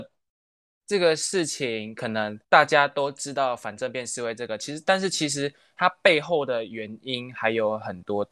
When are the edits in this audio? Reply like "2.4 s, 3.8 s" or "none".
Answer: 2.4 s